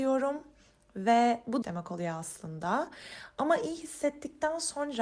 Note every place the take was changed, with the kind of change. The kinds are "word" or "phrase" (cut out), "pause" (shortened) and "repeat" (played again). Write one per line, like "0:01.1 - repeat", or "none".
0:01.6 - phrase